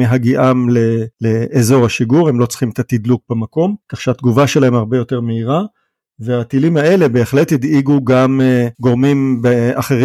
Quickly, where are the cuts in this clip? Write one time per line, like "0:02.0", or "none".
0:01.1
0:03.8
0:08.7